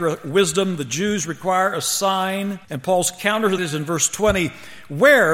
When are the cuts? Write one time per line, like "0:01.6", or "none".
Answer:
0:02.6
0:03.6